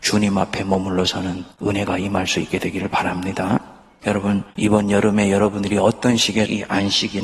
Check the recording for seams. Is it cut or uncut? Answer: uncut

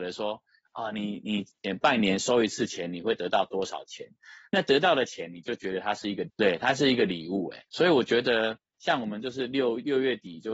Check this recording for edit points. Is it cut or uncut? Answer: cut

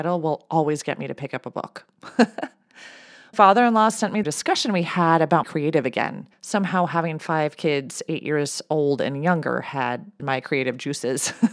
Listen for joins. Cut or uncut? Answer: cut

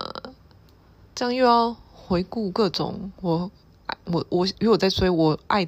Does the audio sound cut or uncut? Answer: cut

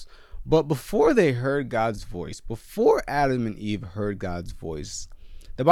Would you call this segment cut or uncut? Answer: uncut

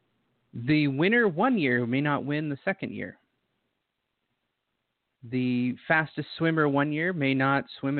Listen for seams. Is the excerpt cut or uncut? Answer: uncut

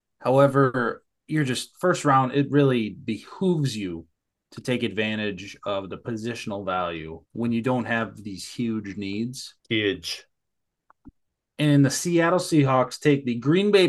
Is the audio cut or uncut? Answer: cut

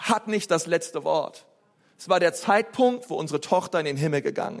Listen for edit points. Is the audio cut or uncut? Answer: uncut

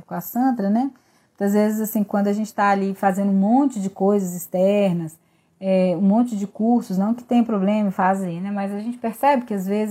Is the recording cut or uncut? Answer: uncut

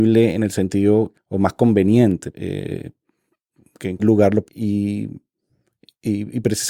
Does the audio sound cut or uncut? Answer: cut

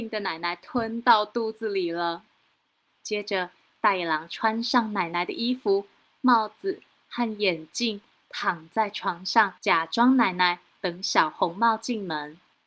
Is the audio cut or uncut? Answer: cut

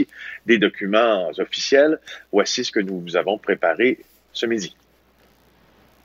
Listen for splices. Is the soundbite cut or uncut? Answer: uncut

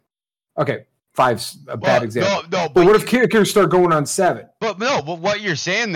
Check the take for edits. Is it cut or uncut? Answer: uncut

